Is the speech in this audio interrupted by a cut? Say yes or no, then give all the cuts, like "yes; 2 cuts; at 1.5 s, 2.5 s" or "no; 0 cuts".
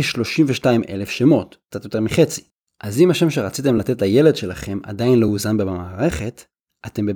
no; 0 cuts